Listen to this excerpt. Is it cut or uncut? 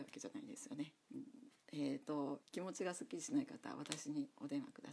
cut